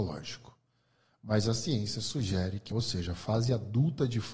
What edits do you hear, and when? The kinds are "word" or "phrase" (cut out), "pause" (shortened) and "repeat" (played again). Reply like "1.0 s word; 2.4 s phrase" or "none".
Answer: 2.7 s phrase